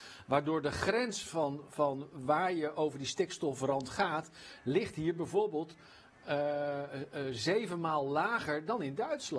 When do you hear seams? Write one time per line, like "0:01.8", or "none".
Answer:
none

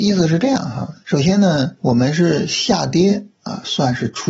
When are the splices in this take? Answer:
0:01.0
0:01.8

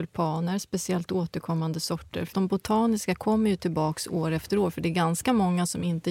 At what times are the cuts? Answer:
0:02.3

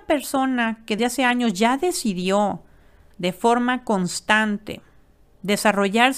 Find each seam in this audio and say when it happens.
0:01.0
0:03.1

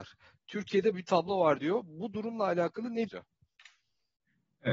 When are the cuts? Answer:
0:00.9
0:03.1

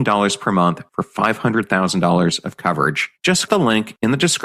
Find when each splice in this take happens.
0:03.5

